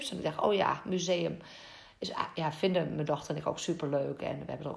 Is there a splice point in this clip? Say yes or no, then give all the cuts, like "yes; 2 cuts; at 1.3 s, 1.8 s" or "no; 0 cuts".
no; 0 cuts